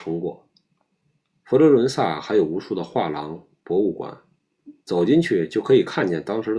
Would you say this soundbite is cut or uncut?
cut